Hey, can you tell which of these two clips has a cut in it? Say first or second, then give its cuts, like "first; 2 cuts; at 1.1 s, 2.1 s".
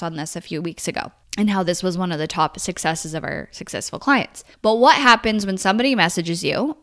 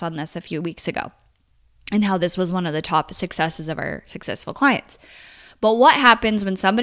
first; 2 cuts; at 1.2 s, 4.5 s